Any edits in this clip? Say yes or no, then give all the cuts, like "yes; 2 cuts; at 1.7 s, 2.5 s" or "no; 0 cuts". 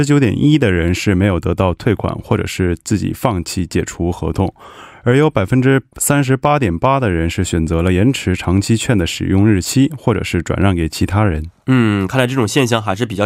no; 0 cuts